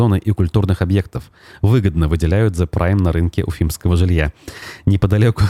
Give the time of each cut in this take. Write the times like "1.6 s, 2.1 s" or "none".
none

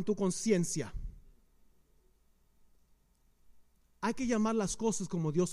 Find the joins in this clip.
none

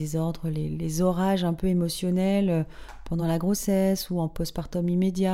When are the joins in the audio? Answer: none

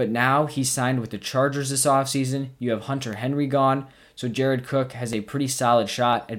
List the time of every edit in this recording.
none

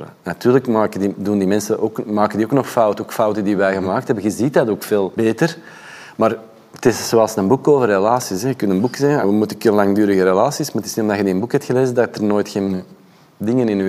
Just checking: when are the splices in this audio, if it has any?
9.2 s

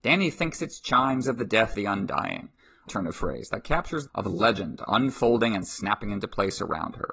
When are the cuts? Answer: 1.2 s, 1.7 s, 2.9 s, 4.1 s

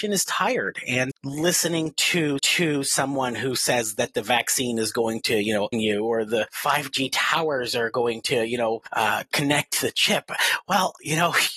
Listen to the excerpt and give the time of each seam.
1.1 s, 2.4 s, 5.7 s

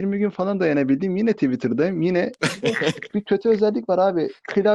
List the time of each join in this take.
3.1 s

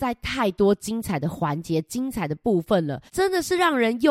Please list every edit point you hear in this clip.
3.1 s

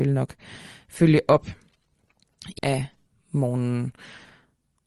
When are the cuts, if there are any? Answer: 2.6 s

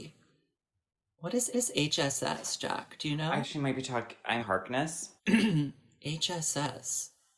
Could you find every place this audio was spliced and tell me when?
1.5 s, 3.4 s, 4.4 s, 5.2 s

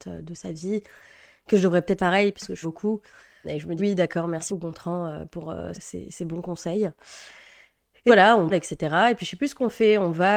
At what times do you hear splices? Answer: 2.0 s, 2.6 s, 3.4 s, 3.8 s, 4.5 s, 5.7 s, 8.1 s, 8.5 s

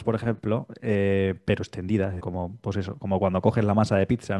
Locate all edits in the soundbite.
2.2 s

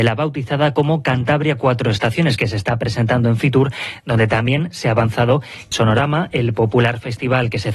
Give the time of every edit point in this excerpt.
5.7 s

